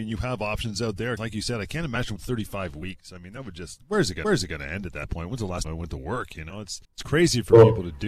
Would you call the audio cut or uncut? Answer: cut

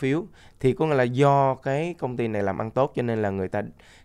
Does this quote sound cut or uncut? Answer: uncut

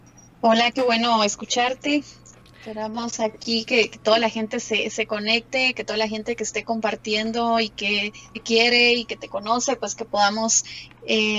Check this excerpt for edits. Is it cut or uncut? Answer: cut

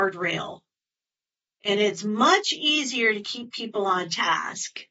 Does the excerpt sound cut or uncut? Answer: uncut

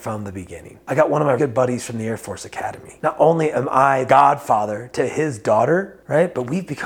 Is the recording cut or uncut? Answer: cut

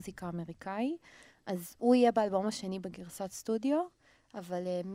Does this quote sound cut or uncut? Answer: uncut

